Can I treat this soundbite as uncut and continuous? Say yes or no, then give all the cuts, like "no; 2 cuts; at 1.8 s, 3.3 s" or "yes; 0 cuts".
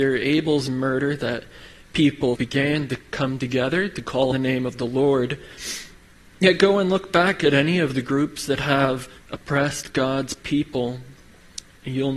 no; 3 cuts; at 2.4 s, 4.3 s, 9.2 s